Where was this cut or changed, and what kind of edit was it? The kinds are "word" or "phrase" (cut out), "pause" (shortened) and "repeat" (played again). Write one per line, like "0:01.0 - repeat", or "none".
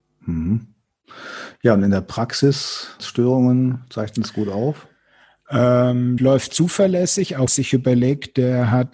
0:03.0 - phrase
0:06.2 - word
0:07.5 - phrase